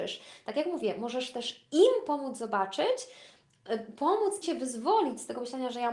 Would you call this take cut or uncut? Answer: cut